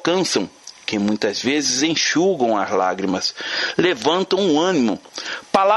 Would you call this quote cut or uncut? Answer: uncut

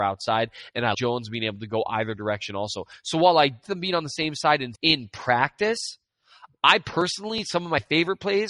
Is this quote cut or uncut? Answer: cut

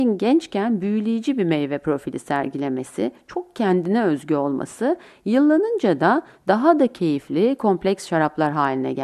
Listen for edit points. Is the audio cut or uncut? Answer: uncut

